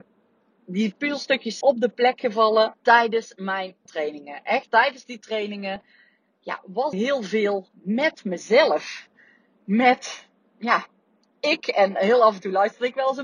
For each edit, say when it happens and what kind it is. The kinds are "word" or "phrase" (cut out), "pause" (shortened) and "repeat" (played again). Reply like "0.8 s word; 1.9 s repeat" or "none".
1.6 s word; 2.8 s pause; 3.9 s word; 4.7 s word; 6.9 s phrase